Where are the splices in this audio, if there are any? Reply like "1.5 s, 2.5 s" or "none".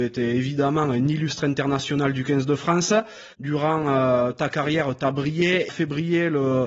3.3 s, 5.7 s